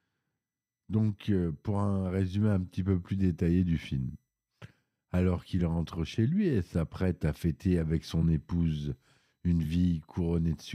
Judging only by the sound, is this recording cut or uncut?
uncut